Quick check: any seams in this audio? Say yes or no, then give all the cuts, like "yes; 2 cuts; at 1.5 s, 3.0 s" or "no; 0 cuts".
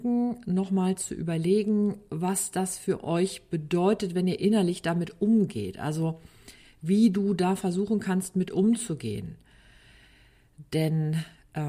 no; 0 cuts